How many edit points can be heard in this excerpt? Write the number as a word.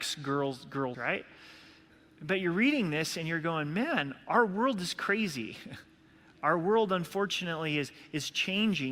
one